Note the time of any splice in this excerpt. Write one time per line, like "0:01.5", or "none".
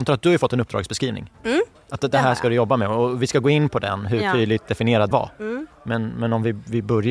0:05.1